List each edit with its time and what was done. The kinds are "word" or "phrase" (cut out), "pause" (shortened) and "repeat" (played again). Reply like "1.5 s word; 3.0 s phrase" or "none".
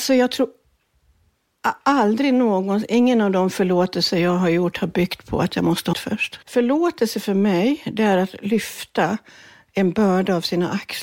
5.9 s phrase; 6.4 s pause